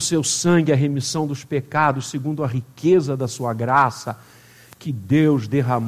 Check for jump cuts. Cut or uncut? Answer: uncut